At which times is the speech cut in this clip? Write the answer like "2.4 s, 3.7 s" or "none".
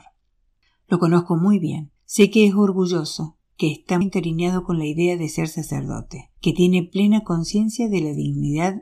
2.0 s, 4.0 s, 6.4 s